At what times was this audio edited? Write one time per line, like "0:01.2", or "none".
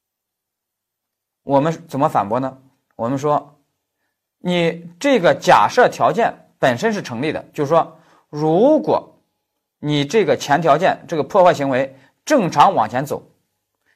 none